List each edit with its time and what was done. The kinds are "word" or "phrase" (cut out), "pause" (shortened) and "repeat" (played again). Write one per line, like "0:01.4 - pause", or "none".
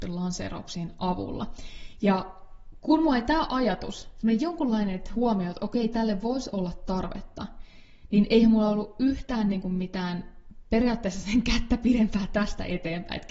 none